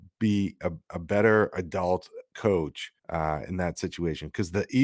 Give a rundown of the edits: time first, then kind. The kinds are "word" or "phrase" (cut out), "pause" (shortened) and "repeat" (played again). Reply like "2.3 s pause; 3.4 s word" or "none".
3.0 s pause